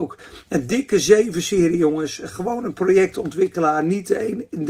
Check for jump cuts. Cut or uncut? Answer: uncut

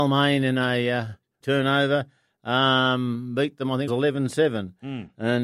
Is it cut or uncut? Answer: cut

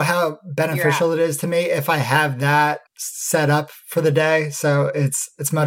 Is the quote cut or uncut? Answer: cut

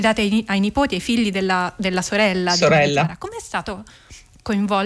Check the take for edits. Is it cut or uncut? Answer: uncut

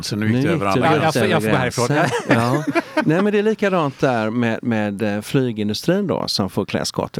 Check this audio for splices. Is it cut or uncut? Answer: uncut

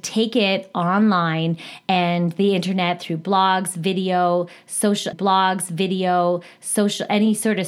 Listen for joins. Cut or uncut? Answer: cut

